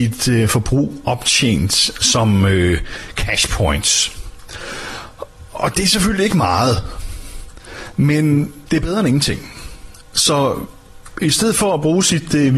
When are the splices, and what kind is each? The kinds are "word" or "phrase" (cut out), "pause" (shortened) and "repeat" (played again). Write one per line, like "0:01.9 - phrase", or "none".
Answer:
none